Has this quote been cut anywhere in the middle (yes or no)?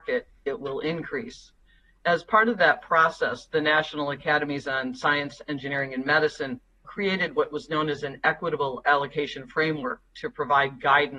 yes